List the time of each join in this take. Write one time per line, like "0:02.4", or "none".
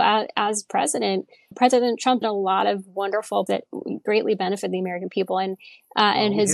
0:01.5
0:02.2
0:03.5
0:04.1